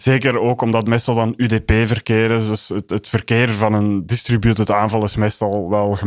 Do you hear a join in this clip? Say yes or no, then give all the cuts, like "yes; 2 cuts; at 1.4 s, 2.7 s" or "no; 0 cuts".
no; 0 cuts